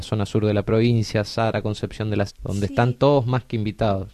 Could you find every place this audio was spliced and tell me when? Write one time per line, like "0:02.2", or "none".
0:02.3